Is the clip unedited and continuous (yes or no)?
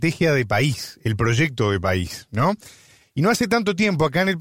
yes